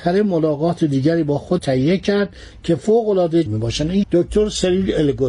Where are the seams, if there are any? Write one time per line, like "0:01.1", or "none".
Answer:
0:01.6
0:03.5
0:04.0